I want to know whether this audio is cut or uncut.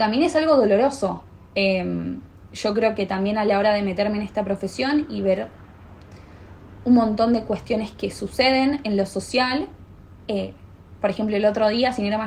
uncut